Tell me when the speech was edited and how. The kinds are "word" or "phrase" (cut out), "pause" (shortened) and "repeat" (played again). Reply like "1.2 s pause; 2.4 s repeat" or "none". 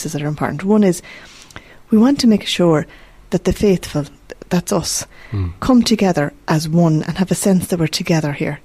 none